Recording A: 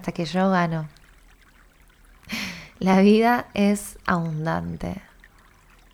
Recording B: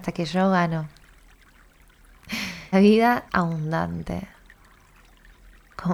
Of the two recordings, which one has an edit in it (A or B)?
B